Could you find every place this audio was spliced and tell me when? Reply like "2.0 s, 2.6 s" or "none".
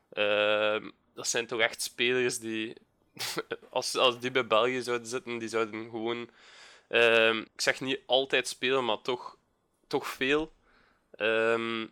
7.5 s